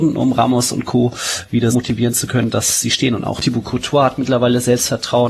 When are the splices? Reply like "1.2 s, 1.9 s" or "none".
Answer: 1.7 s